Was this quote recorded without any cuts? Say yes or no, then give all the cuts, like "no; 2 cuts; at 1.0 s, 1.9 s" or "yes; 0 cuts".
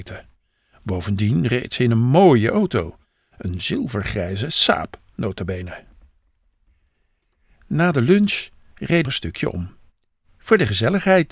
no; 1 cut; at 9.0 s